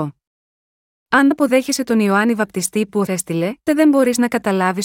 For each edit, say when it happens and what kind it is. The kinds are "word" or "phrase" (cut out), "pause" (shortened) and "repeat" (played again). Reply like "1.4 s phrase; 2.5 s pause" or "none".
1.3 s word; 3.1 s word; 3.7 s word